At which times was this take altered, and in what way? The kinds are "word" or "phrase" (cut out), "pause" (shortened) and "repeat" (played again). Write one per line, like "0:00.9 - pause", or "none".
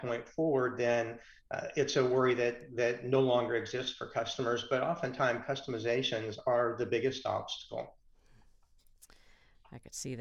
none